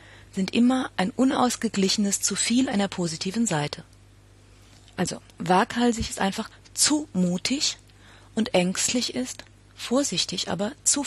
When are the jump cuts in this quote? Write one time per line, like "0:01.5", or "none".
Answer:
none